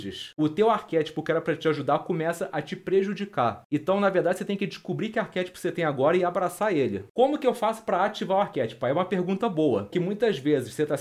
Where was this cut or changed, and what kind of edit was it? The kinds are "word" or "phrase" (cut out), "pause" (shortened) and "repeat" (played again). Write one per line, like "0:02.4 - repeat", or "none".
0:09.9 - word